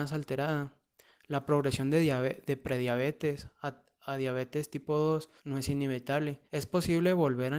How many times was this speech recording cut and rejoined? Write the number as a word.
two